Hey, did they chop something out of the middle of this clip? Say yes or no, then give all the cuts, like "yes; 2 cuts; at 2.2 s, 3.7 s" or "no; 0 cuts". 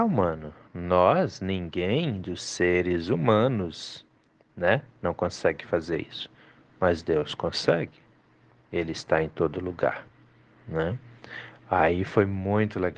no; 0 cuts